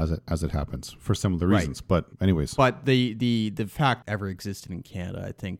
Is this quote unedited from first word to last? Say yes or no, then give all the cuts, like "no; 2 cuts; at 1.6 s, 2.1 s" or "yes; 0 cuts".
no; 2 cuts; at 2.1 s, 4.0 s